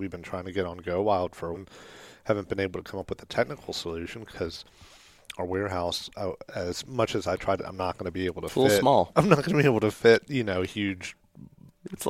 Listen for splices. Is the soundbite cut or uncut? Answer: cut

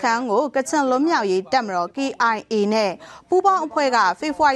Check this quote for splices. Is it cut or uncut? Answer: uncut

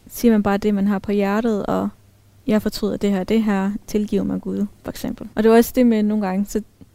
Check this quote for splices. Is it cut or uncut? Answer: cut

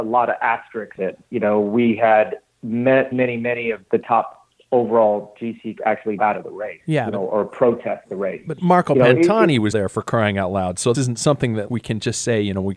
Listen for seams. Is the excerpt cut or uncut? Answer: cut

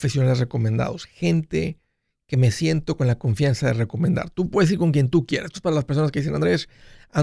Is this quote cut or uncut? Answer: uncut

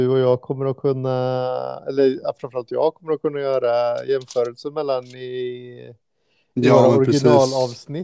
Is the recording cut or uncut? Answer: uncut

